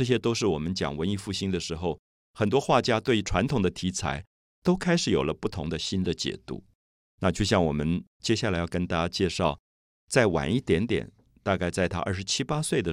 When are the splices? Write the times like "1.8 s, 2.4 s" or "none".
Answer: none